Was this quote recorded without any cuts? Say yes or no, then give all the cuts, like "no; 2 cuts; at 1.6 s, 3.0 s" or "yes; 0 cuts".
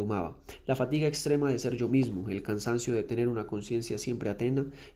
yes; 0 cuts